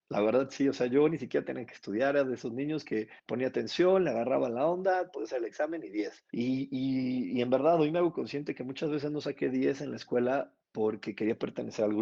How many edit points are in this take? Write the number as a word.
three